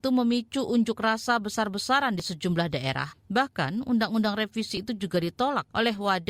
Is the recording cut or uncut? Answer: uncut